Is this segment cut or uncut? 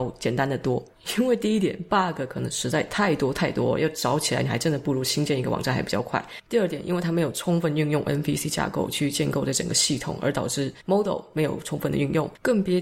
uncut